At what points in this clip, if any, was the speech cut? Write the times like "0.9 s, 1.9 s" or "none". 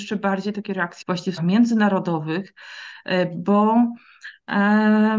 1.0 s, 1.4 s